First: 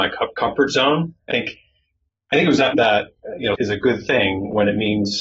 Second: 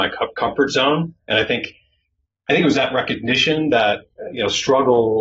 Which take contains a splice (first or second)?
first